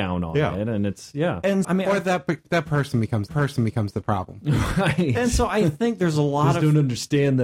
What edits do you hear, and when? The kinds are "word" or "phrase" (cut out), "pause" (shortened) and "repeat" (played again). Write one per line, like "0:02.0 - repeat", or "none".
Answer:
0:01.6 - word
0:03.3 - repeat